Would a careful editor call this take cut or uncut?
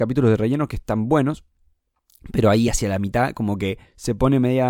uncut